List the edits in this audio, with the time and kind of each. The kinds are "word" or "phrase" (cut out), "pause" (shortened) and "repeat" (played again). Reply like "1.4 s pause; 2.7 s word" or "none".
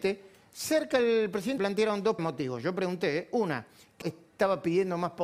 1.6 s word; 2.2 s word; 4.0 s word